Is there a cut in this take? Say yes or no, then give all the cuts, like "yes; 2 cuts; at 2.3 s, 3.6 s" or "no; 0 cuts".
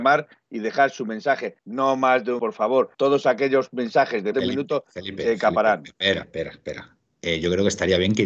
yes; 5 cuts; at 1.6 s, 2.4 s, 2.9 s, 4.3 s, 6.2 s